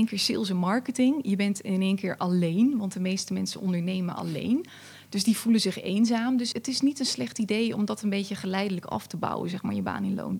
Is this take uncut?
no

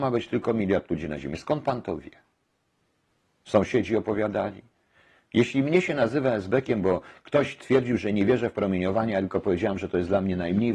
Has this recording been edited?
no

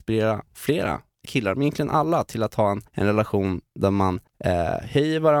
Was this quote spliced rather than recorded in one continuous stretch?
yes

